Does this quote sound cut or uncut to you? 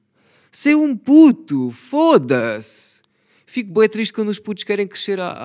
uncut